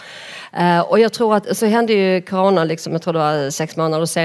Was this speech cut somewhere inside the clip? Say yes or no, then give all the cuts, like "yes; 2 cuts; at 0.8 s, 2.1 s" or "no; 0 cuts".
yes; 1 cut; at 1.6 s